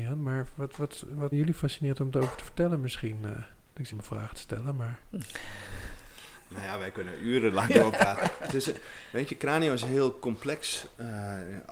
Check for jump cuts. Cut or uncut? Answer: cut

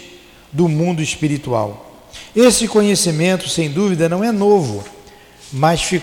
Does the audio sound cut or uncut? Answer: uncut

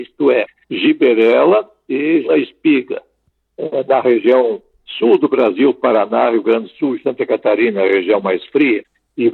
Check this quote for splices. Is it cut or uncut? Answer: cut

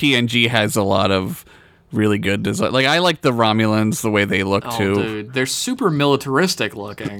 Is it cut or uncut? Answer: uncut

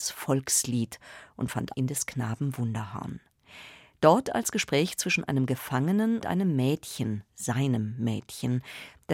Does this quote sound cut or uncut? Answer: cut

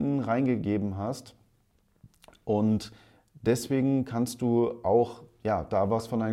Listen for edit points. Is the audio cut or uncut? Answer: uncut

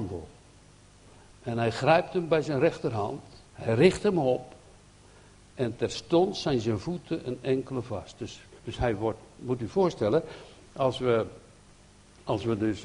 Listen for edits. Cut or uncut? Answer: cut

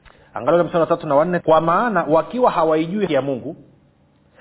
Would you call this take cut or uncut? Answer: cut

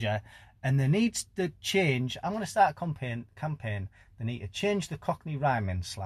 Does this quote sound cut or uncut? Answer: uncut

